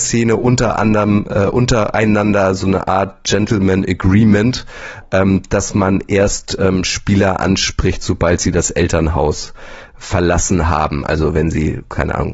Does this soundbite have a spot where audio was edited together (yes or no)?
no